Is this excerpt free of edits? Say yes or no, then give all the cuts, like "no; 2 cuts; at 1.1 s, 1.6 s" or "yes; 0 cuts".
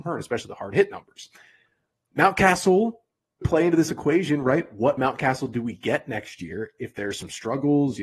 no; 2 cuts; at 3.4 s, 5.0 s